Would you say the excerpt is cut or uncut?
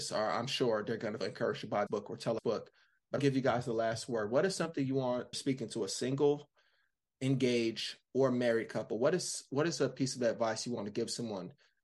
cut